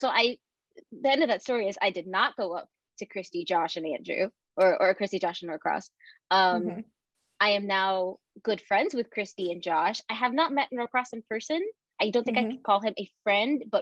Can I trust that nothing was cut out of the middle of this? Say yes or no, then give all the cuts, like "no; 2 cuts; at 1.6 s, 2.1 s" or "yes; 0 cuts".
yes; 0 cuts